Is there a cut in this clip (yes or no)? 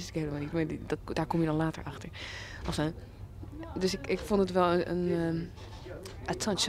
yes